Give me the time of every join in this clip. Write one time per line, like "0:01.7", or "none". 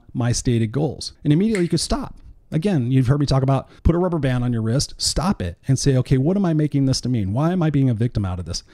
0:01.1
0:03.8